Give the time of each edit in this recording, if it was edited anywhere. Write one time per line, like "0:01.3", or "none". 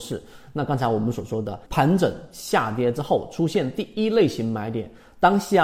0:01.6